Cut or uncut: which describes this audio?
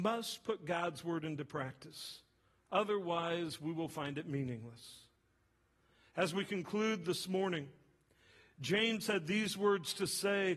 uncut